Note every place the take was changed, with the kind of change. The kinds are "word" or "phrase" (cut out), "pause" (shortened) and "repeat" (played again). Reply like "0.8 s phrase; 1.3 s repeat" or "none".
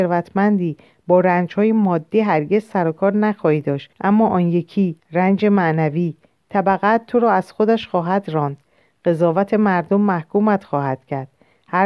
3.9 s pause; 5.0 s pause

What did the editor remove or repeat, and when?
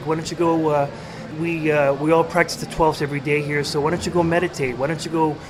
1.3 s phrase; 2.9 s word

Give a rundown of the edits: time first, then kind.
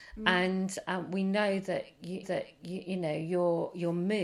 2.2 s repeat

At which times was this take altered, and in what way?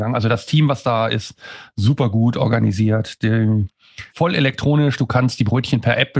4.1 s pause

